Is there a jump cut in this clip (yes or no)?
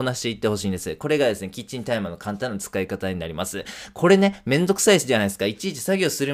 no